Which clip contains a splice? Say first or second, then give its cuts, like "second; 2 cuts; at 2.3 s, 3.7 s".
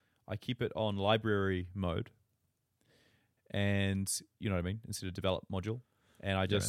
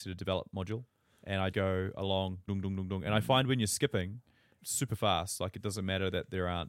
second; 3 cuts; at 1.5 s, 2.5 s, 4.6 s